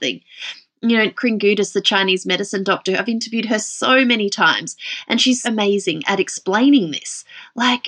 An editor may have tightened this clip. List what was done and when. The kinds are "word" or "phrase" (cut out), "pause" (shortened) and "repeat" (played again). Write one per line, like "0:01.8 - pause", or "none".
0:01.2 - word
0:05.4 - word